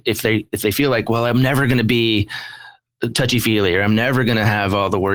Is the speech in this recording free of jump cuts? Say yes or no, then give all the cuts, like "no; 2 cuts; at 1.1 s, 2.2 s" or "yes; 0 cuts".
yes; 0 cuts